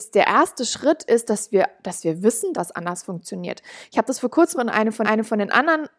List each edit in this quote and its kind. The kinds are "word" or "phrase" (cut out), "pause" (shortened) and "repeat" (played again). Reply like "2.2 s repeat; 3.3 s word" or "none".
2.5 s word; 4.5 s word; 5.0 s repeat